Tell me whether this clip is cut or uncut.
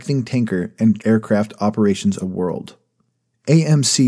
cut